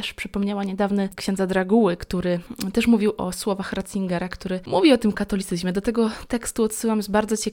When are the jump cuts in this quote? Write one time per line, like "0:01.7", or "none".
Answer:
0:01.1
0:05.1